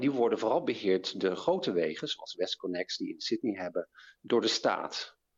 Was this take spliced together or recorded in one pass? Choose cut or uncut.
uncut